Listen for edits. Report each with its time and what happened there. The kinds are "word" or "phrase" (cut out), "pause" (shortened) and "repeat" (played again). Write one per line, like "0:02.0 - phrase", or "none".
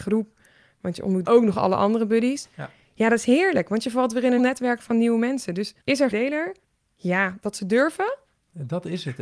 0:01.2 - word
0:04.4 - word
0:05.8 - pause
0:06.1 - word
0:06.6 - pause